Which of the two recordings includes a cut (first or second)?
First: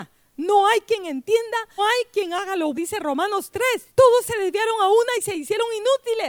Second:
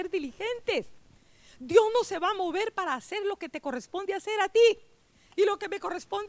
first